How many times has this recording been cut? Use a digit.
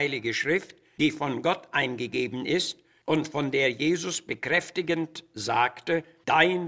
0